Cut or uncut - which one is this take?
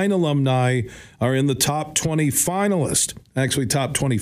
uncut